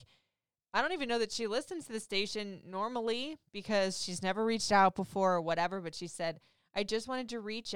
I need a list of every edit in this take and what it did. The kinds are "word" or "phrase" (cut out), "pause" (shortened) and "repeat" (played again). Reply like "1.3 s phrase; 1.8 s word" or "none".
none